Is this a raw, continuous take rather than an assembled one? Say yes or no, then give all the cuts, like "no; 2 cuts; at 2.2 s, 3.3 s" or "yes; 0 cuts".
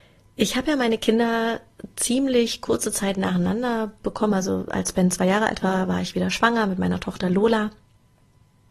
yes; 0 cuts